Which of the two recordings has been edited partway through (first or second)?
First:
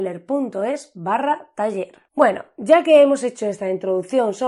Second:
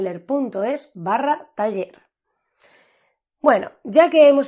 first